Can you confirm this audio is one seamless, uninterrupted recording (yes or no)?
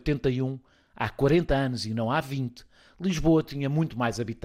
yes